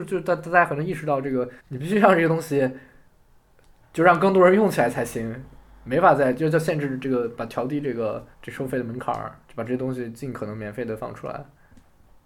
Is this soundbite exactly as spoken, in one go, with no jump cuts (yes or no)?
no